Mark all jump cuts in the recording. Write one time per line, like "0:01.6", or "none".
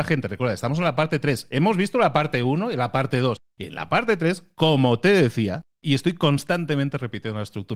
none